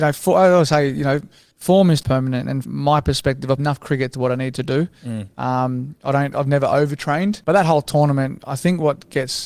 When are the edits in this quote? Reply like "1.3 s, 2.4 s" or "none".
2.0 s, 2.6 s, 3.6 s, 4.1 s